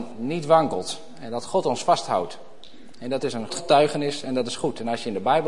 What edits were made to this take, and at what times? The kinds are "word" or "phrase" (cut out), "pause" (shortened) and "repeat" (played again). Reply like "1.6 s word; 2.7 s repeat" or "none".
3.5 s word